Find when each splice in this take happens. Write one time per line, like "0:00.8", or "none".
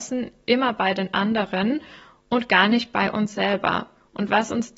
none